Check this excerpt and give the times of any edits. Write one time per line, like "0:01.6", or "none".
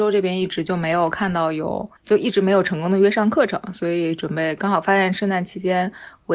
0:02.0